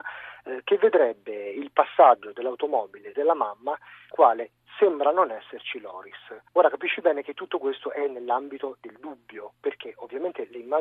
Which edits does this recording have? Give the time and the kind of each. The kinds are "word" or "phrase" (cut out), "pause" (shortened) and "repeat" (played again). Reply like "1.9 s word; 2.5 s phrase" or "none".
4.1 s word; 6.5 s pause